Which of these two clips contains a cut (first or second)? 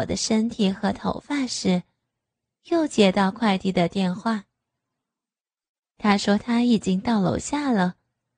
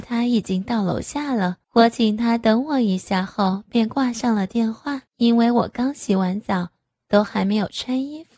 second